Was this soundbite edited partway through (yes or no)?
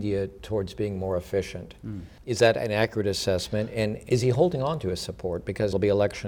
no